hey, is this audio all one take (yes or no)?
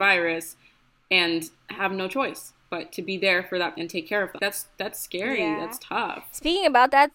no